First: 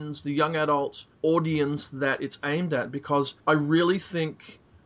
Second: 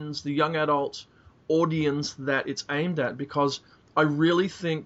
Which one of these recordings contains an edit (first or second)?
first